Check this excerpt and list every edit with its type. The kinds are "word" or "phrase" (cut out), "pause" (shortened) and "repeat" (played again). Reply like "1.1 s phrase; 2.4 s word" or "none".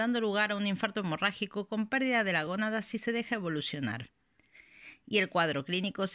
none